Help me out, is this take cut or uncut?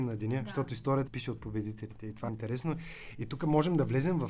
cut